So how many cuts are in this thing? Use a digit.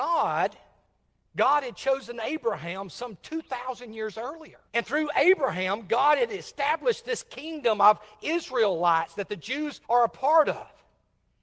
2